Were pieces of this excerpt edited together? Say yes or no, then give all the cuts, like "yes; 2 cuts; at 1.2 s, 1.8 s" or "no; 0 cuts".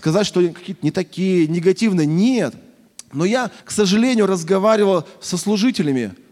yes; 1 cut; at 3.6 s